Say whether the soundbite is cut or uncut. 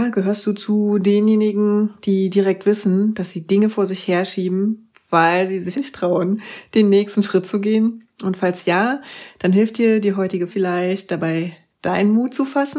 cut